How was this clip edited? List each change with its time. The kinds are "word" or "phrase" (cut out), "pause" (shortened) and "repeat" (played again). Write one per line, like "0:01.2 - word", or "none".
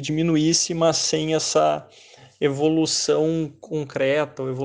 none